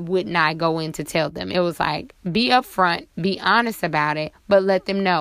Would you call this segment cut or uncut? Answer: uncut